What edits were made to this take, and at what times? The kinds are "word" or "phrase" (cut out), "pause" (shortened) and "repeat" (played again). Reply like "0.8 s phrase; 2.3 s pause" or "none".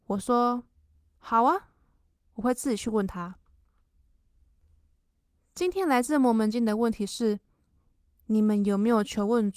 none